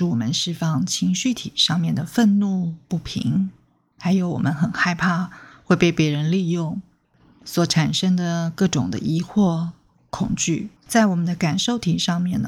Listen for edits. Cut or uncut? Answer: cut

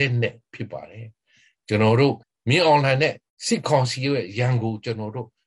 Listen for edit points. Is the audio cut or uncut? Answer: cut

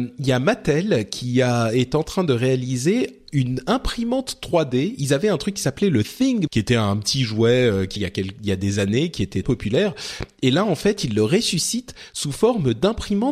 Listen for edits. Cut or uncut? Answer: cut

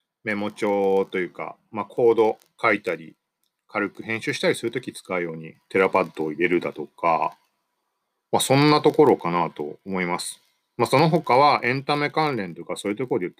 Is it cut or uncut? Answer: uncut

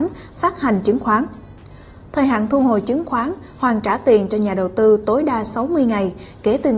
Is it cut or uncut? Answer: uncut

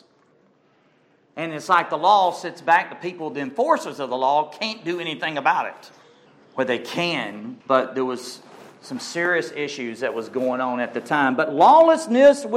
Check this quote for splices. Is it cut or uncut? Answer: cut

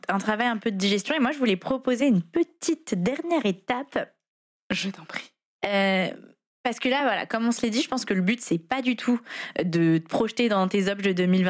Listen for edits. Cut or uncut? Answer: uncut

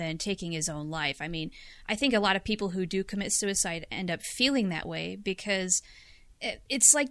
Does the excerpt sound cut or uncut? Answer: uncut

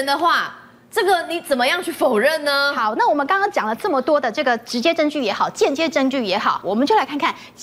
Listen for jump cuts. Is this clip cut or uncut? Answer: cut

